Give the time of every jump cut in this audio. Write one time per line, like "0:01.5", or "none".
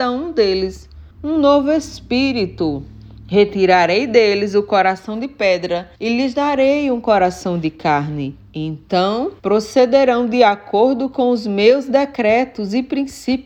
0:01.1
0:06.0
0:09.4